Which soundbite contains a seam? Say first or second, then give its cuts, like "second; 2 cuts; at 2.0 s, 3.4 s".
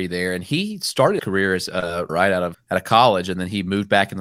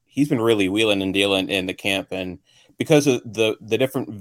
first; 3 cuts; at 1.2 s, 2.1 s, 2.5 s